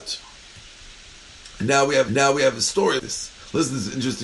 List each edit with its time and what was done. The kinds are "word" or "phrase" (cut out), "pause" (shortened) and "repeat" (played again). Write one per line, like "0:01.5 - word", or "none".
0:02.1 - repeat
0:03.0 - word